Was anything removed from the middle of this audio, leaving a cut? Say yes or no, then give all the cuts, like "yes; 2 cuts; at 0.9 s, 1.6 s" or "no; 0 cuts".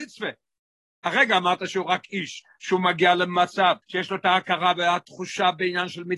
yes; 1 cut; at 3.8 s